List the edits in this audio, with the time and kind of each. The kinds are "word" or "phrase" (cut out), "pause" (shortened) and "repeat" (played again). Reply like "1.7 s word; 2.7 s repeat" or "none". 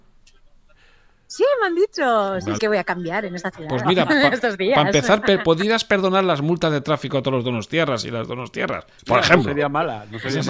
2.6 s phrase

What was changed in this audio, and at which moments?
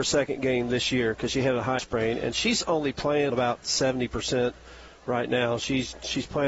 1.8 s word; 3.3 s word

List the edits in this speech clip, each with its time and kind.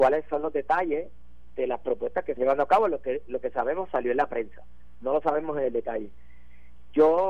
2.4 s word

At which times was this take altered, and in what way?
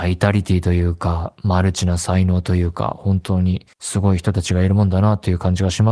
3.7 s pause

